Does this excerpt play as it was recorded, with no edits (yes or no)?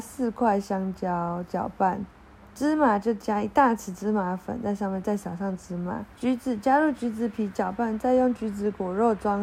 no